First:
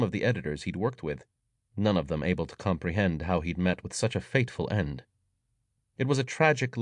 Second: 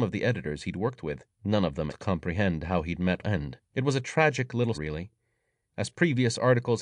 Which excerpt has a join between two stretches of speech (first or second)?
second